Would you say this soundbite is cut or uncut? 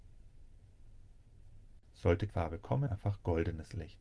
cut